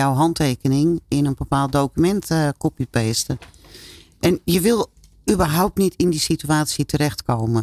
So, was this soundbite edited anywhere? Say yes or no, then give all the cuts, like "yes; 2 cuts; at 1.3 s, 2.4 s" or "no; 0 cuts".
no; 0 cuts